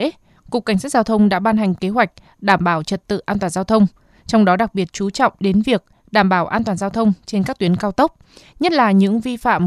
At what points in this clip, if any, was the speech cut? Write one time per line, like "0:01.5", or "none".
none